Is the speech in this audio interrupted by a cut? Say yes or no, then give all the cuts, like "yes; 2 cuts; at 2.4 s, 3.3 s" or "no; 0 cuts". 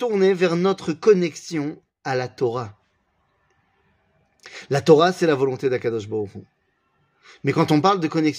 no; 0 cuts